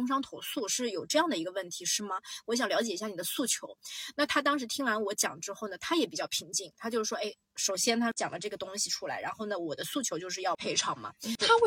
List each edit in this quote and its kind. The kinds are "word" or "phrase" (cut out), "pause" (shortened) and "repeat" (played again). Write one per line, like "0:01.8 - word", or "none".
none